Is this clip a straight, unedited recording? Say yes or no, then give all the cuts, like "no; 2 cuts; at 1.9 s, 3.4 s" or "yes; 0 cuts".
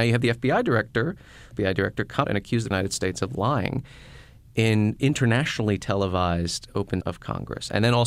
no; 5 cuts; at 1.5 s, 2.2 s, 2.7 s, 5.0 s, 7.0 s